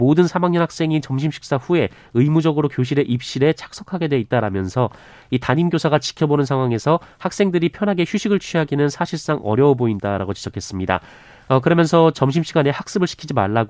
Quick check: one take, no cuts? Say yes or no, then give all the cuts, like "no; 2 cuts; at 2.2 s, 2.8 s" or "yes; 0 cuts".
yes; 0 cuts